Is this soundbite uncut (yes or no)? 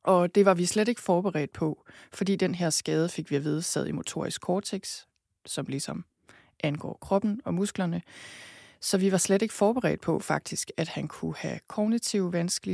yes